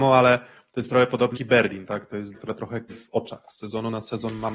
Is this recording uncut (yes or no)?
no